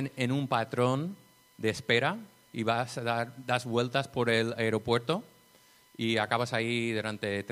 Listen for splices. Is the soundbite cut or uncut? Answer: uncut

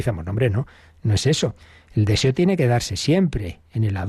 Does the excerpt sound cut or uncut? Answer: uncut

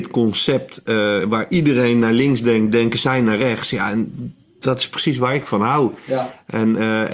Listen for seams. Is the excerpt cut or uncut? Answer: uncut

